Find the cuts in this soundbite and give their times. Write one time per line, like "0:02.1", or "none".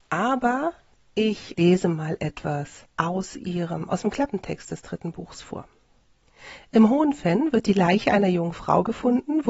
0:01.5
0:02.9